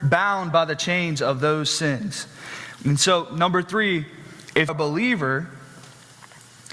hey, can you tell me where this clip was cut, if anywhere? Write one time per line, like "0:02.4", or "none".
0:04.7